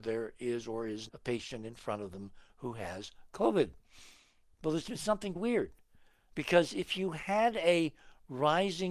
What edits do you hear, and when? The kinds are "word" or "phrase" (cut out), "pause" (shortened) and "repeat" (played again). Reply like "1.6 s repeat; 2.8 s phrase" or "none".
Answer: 1.1 s word; 5.4 s word